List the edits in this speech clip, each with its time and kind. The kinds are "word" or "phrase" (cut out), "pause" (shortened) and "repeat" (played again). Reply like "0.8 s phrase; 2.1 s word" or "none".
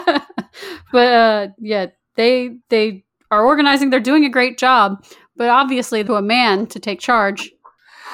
2.6 s pause; 6.1 s phrase